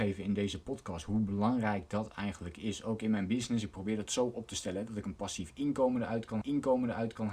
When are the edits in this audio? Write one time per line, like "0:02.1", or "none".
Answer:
0:06.4